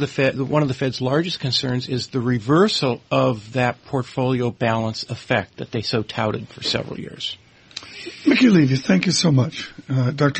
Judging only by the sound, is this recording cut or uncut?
cut